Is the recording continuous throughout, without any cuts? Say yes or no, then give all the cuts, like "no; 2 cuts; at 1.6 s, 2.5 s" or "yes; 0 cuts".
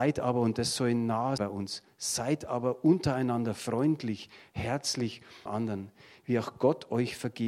no; 2 cuts; at 1.4 s, 5.5 s